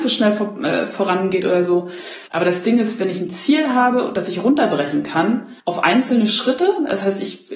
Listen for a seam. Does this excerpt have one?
yes; 2 cuts; at 2.3 s, 5.6 s

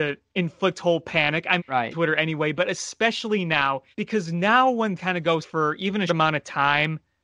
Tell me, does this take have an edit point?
yes; 6 cuts; at 1.6 s, 1.9 s, 3.9 s, 5.0 s, 5.4 s, 6.1 s

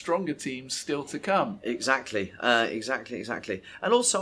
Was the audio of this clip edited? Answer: no; 0 cuts

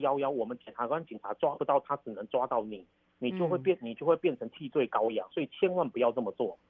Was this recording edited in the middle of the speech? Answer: no; 0 cuts

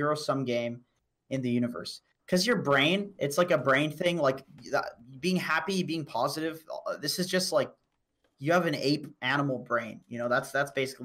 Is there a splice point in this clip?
no; 0 cuts

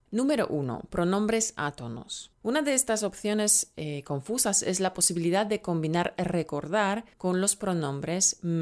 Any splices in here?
yes; 2 cuts; at 2.3 s, 7.1 s

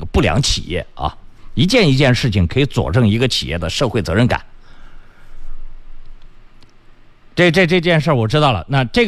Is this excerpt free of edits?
yes; 0 cuts

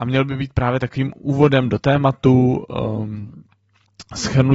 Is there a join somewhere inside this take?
no; 0 cuts

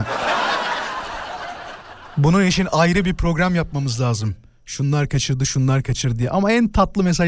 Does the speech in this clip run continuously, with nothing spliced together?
yes; 0 cuts

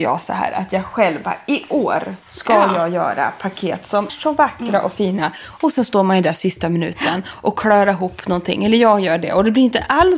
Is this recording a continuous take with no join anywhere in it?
no; 2 cuts; at 2.2 s, 4.1 s

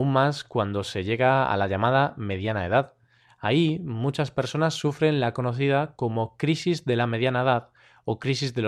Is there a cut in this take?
no; 0 cuts

